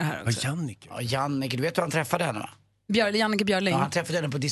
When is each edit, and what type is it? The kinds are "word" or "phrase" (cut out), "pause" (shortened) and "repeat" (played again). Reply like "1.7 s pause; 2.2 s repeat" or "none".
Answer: none